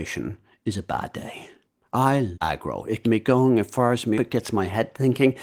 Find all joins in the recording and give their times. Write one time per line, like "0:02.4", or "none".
0:02.3
0:03.0
0:04.1